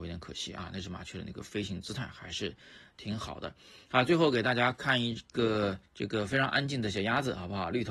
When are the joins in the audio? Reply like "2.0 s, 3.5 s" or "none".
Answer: 5.9 s